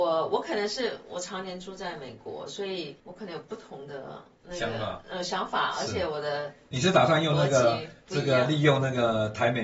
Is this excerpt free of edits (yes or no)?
no